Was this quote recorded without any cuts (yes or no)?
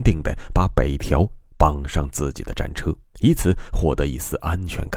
no